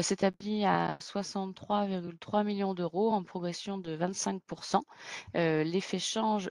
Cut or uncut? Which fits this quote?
uncut